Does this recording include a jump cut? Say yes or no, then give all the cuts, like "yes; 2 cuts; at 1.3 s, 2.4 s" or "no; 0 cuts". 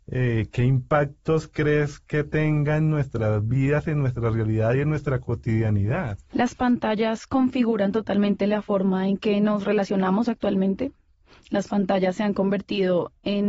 no; 0 cuts